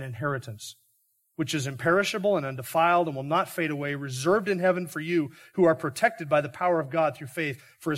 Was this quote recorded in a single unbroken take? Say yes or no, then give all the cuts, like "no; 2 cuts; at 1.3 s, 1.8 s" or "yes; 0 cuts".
yes; 0 cuts